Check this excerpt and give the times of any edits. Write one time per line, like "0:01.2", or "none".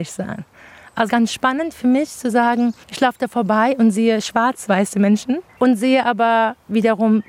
0:01.1
0:02.8
0:04.7
0:05.5